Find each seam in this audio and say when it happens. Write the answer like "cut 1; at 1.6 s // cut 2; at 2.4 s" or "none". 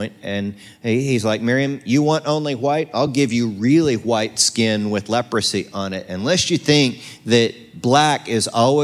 none